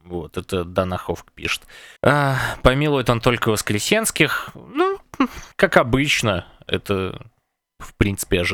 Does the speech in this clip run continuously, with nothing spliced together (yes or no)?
no